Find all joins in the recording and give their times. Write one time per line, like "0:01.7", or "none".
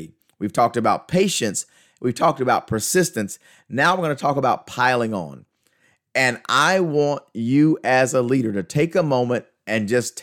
none